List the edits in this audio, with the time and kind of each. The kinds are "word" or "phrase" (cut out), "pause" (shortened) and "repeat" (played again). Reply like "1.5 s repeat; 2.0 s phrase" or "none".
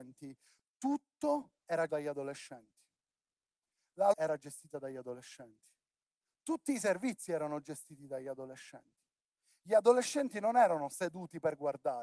1.9 s word; 4.1 s word; 6.1 s pause